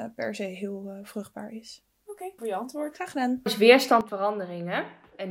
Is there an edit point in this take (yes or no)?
yes